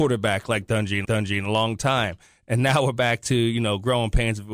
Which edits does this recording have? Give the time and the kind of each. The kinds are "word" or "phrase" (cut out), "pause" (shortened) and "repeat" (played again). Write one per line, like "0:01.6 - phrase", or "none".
0:01.0 - repeat